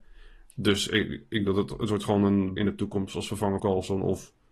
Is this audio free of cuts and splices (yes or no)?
no